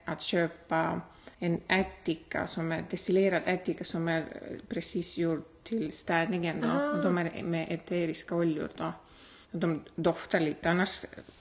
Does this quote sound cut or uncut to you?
cut